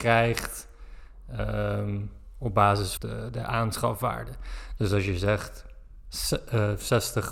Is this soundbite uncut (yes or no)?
no